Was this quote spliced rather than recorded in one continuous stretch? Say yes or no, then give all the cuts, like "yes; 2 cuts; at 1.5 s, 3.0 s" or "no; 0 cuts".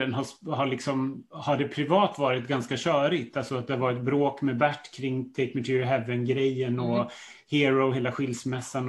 no; 0 cuts